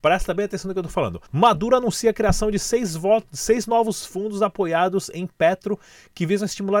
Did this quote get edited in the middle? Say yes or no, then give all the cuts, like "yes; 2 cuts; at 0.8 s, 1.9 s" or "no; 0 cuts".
yes; 1 cut; at 1.3 s